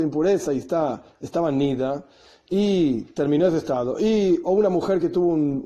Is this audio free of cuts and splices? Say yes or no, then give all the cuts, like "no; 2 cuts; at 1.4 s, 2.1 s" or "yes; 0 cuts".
yes; 0 cuts